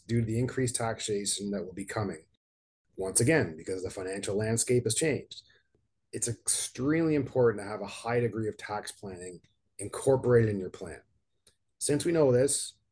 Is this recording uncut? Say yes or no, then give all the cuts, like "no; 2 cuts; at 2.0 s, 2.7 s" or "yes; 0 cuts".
yes; 0 cuts